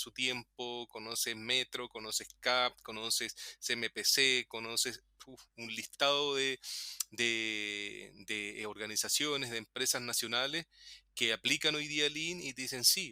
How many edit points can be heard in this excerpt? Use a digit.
1